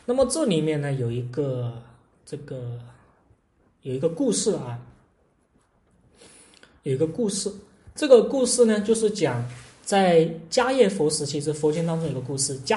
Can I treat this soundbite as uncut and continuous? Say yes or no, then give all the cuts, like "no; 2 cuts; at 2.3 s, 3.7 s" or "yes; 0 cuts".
yes; 0 cuts